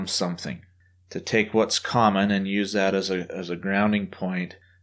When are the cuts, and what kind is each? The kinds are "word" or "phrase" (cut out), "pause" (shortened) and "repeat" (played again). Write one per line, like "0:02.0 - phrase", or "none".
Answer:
none